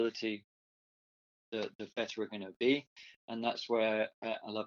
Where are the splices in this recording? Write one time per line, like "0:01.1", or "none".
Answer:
none